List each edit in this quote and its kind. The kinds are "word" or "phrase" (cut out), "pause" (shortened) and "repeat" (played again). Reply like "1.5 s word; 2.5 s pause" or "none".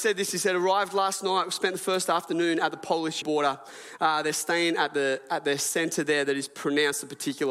3.2 s word